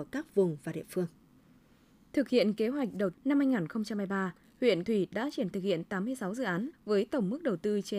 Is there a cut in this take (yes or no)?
yes